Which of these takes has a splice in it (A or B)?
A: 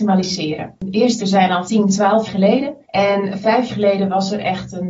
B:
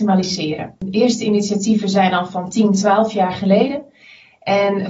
A